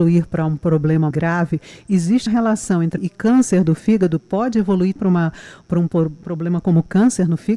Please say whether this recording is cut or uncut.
cut